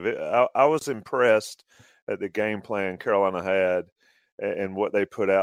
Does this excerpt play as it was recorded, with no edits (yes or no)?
yes